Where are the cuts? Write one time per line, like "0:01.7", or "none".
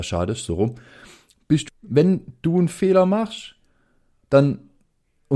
0:01.7